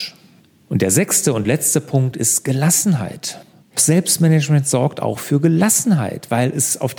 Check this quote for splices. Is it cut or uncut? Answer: uncut